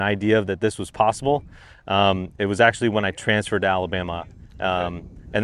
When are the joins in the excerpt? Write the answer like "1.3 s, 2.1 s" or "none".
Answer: none

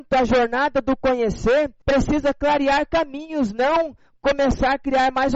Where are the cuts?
1.8 s

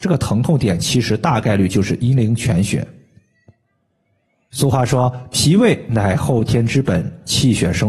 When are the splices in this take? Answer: none

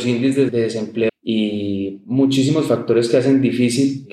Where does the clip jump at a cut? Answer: 1.1 s

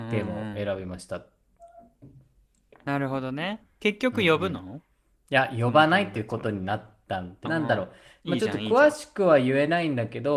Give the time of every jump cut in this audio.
7.5 s

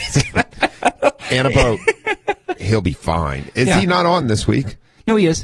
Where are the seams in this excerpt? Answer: none

